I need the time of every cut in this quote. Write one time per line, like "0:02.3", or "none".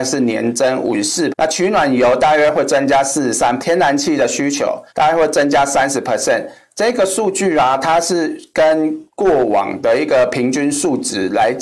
0:01.3
0:03.6
0:04.9
0:09.1